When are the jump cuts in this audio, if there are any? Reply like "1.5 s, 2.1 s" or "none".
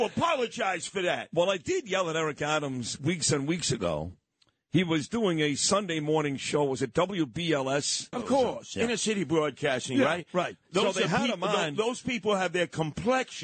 8.1 s